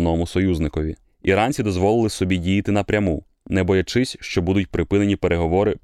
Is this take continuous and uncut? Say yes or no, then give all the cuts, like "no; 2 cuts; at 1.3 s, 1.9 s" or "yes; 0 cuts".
yes; 0 cuts